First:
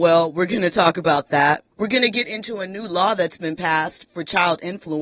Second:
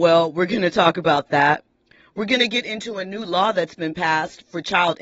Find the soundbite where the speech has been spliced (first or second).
first